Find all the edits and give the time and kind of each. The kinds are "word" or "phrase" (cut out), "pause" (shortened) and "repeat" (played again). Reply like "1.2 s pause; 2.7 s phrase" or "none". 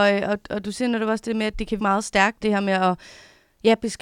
1.8 s word; 2.4 s word